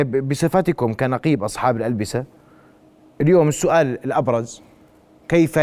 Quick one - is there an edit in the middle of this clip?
no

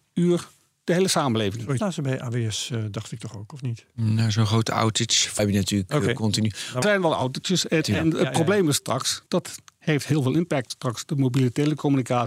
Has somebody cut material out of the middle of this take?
yes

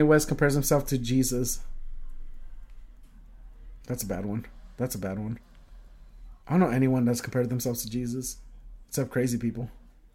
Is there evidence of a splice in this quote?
yes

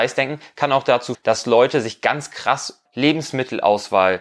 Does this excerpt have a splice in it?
yes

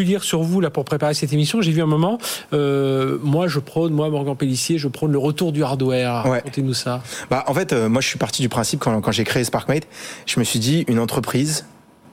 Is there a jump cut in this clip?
no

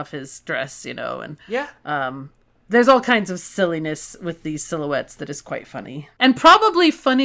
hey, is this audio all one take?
yes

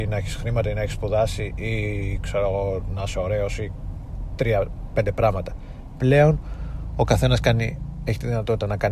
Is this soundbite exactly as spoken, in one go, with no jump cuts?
yes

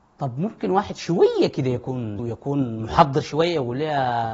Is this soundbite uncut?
no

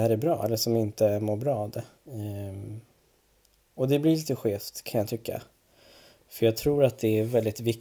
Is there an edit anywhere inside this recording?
yes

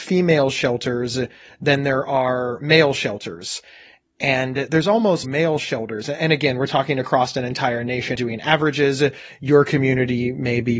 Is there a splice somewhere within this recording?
yes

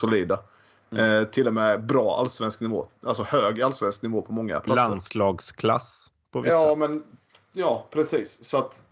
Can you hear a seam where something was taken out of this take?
no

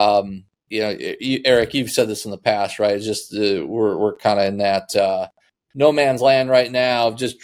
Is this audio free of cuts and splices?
yes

